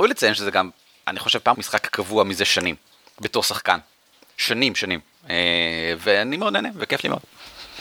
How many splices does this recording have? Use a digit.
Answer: 1